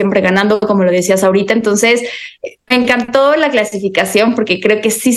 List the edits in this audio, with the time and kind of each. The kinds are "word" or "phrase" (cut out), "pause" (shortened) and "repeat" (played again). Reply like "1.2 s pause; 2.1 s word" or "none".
2.7 s word